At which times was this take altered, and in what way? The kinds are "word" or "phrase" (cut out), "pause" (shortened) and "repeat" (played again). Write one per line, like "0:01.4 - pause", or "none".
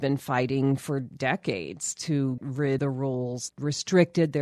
0:02.4 - word
0:02.8 - word
0:03.5 - word